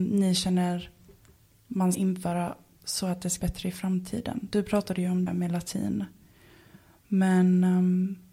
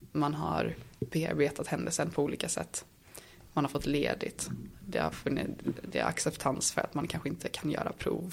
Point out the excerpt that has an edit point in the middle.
first; 3 cuts; at 1.9 s, 3.4 s, 5.3 s

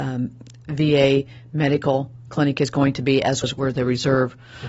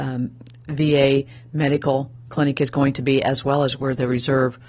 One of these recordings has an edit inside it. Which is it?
first; 1 cut; at 3.4 s

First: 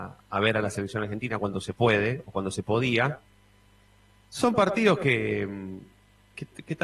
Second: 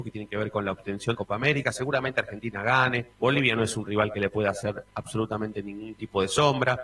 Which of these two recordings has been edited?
second; 2 cuts; at 1.1 s, 3.1 s

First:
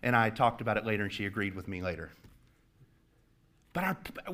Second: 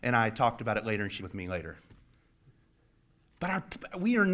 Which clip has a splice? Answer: second; 1 cut; at 1.2 s

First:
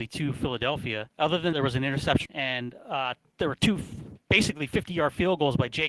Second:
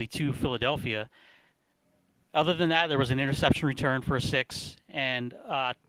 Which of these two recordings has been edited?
first; 3 cuts; at 1.1 s, 1.5 s, 2.3 s

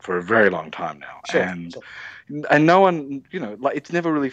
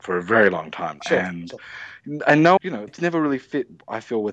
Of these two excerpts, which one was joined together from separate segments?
second; 3 cuts; at 1.0 s, 2.6 s, 2.9 s

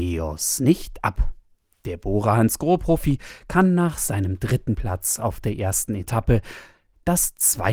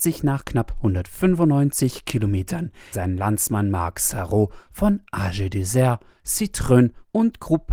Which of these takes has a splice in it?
second; 1 cut; at 2.9 s

